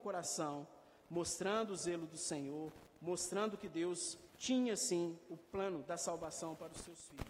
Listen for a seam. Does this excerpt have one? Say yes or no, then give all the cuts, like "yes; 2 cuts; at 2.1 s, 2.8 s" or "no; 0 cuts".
yes; 1 cut; at 4.3 s